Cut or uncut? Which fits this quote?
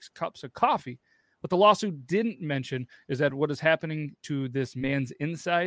uncut